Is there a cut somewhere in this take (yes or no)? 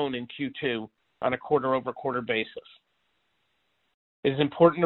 no